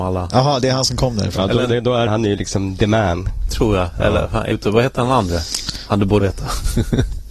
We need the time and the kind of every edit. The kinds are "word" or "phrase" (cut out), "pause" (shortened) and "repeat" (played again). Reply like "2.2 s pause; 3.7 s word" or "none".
2.1 s word; 4.5 s word; 6.2 s word